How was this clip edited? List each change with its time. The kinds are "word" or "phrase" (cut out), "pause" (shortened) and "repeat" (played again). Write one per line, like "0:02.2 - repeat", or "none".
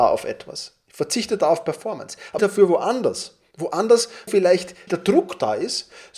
0:02.4 - phrase
0:04.3 - word
0:04.9 - word